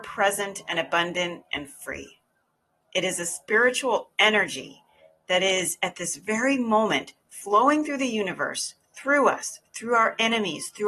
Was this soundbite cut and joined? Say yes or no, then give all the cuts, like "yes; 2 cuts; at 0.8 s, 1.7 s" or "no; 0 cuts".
no; 0 cuts